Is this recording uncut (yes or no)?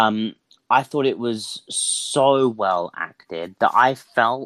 yes